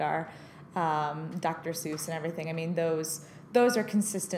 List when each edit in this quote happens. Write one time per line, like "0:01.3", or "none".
none